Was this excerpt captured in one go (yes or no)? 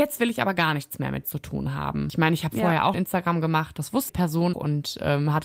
no